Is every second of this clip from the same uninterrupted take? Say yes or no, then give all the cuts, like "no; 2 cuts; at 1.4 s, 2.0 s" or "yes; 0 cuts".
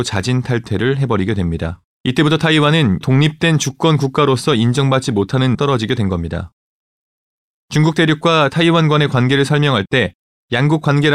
no; 3 cuts; at 1.9 s, 3.0 s, 5.5 s